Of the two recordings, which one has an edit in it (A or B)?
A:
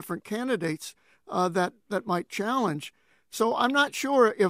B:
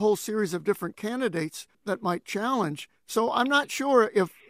B